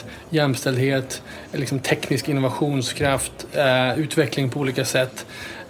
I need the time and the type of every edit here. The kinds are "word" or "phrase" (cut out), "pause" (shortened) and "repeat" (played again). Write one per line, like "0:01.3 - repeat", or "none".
none